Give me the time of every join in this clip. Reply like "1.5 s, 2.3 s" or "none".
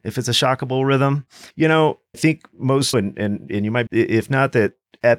1.5 s, 2.1 s, 2.9 s, 3.9 s